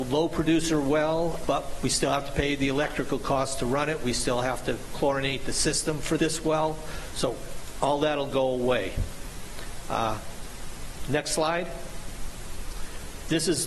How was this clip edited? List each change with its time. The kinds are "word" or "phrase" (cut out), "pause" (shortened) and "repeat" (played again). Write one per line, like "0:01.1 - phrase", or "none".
0:01.4 - word
0:06.2 - word